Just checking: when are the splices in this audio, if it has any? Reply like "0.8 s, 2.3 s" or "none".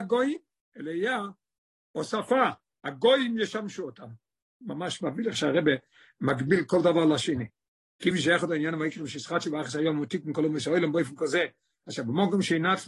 none